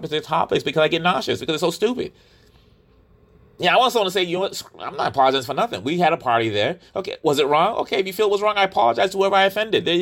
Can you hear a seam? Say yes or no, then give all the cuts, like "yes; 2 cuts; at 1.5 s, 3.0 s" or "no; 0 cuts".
no; 0 cuts